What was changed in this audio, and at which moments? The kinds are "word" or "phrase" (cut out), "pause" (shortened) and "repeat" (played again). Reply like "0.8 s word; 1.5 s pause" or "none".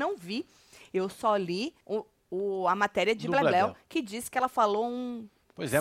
1.8 s pause